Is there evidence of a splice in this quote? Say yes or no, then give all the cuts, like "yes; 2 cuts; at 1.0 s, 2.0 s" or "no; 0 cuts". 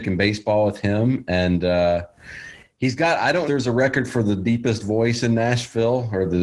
yes; 1 cut; at 3.5 s